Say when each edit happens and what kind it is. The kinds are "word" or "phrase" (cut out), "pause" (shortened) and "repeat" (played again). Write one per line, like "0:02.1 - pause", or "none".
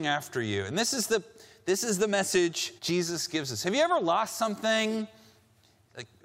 0:02.8 - pause